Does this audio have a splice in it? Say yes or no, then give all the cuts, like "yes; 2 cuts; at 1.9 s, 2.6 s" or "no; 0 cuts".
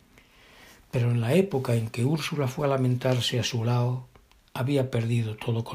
no; 0 cuts